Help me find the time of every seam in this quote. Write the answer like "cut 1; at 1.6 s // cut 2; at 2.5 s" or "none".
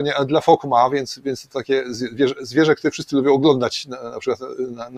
none